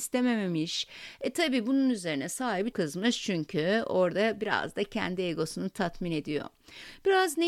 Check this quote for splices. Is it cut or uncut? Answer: cut